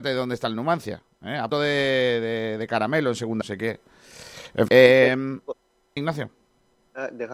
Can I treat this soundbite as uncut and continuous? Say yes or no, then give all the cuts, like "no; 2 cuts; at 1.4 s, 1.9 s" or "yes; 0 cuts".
no; 4 cuts; at 1.5 s, 3.4 s, 4.7 s, 6.0 s